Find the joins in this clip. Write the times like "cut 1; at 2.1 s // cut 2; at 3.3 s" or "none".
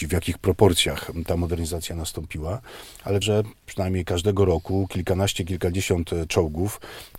cut 1; at 3.2 s